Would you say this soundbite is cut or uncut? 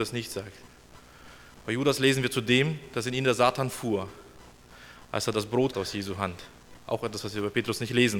cut